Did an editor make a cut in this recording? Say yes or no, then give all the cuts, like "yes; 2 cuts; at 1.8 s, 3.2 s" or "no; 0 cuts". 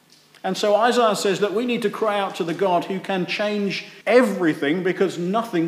yes; 1 cut; at 4.0 s